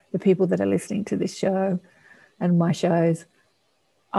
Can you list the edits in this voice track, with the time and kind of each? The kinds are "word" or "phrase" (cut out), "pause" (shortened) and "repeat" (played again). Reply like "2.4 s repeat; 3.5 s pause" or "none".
none